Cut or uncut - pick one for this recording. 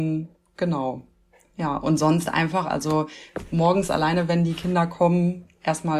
uncut